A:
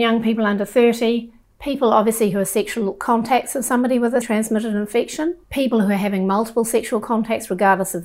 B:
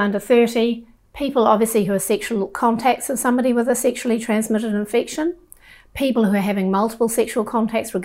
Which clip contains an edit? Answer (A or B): A